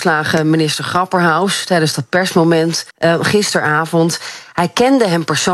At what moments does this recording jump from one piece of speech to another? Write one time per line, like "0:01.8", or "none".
0:02.9